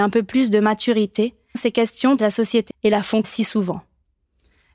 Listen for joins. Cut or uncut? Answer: cut